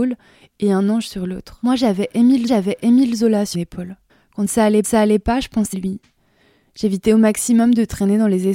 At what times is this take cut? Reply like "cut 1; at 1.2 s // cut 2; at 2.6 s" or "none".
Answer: cut 1; at 2.5 s // cut 2; at 3.5 s // cut 3; at 4.1 s // cut 4; at 4.8 s // cut 5; at 5.7 s

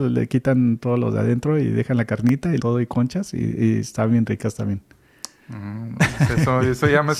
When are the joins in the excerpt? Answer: cut 1; at 2.6 s

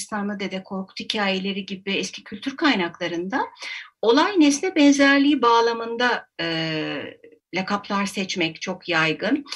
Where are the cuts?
cut 1; at 7.4 s

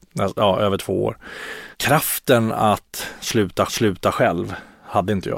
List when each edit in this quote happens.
cut 1; at 1.7 s // cut 2; at 3.7 s

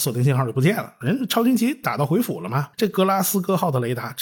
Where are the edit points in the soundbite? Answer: cut 1; at 2.7 s

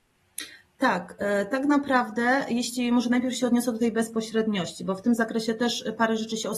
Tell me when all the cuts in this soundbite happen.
none

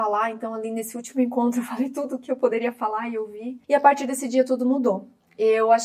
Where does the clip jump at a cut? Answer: cut 1; at 3.6 s

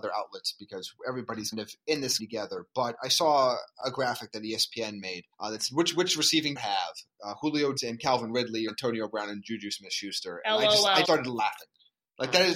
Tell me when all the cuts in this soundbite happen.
cut 1; at 1.5 s // cut 2; at 2.2 s // cut 3; at 5.3 s // cut 4; at 6.6 s // cut 5; at 7.8 s // cut 6; at 8.7 s // cut 7; at 11.0 s

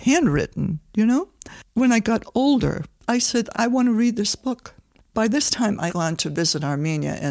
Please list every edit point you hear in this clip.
cut 1; at 3.5 s // cut 2; at 5.9 s

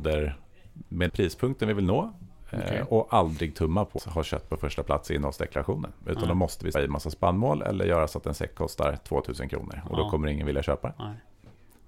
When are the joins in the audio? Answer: cut 1; at 1.1 s // cut 2; at 4.0 s // cut 3; at 6.7 s

